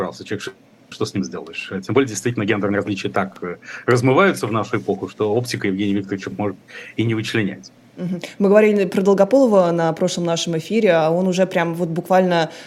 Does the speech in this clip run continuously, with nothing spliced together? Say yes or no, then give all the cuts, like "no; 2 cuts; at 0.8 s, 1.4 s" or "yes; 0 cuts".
no; 2 cuts; at 0.9 s, 6.3 s